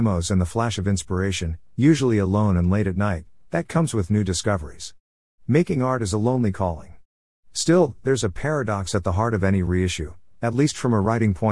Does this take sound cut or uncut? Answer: uncut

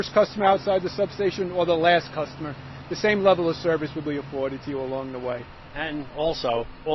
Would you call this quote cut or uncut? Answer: uncut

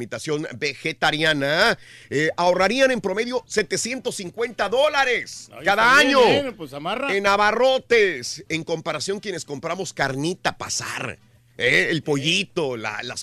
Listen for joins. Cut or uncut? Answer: uncut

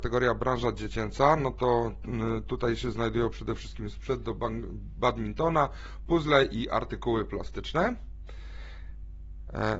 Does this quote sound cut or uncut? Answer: uncut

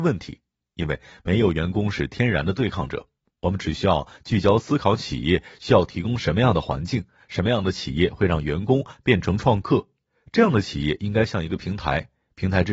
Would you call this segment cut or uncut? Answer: uncut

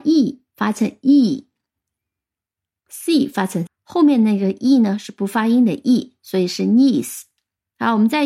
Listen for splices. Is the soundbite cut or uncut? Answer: cut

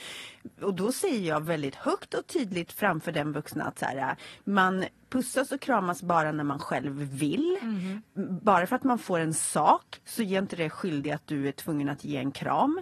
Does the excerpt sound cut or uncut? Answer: uncut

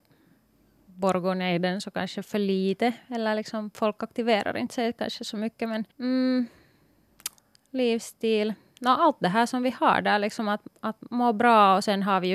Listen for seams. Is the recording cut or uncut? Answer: cut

